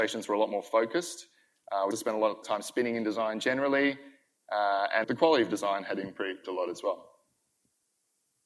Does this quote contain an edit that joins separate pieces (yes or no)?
yes